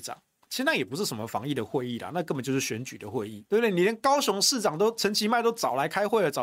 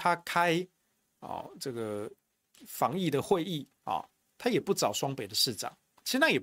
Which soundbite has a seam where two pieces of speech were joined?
first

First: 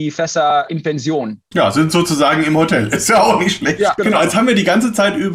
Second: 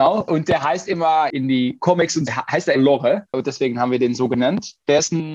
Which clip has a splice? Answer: second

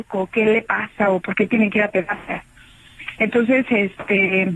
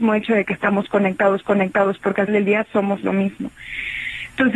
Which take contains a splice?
second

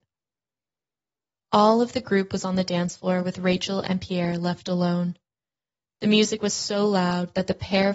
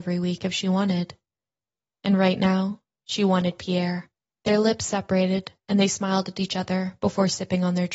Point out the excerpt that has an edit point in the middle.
second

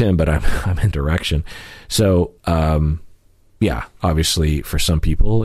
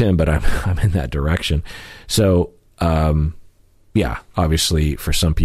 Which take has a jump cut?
first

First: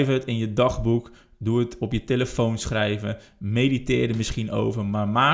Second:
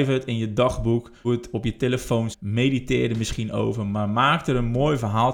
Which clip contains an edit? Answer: second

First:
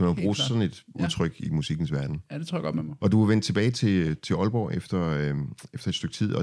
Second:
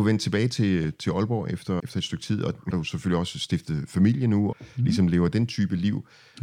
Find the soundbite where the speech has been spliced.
second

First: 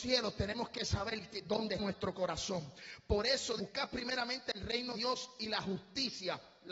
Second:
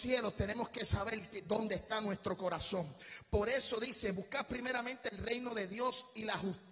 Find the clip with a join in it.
first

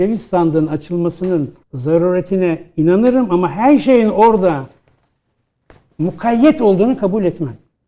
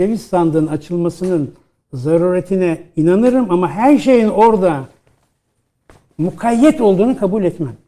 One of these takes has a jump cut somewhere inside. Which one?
first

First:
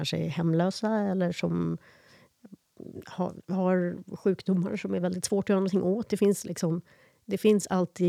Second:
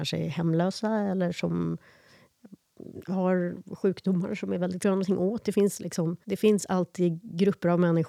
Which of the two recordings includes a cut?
second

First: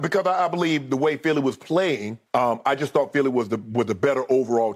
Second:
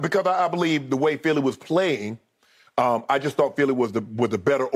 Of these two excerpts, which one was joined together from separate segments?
first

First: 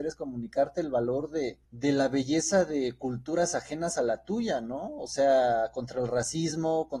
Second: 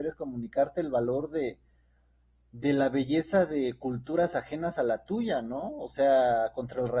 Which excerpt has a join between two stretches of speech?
first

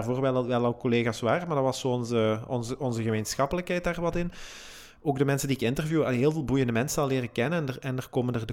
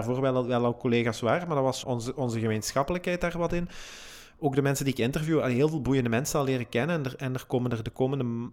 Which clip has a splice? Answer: second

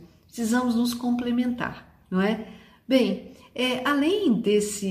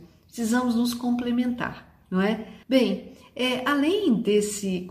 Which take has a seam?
second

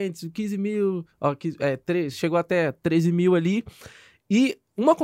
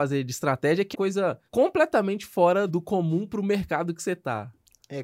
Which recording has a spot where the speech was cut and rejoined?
second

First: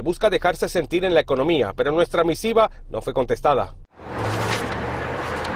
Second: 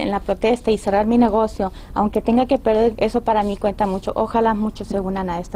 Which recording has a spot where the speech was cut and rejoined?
second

